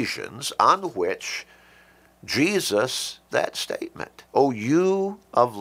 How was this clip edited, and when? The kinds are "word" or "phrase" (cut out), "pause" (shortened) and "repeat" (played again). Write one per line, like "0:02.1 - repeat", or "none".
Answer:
0:03.3 - word
0:04.3 - pause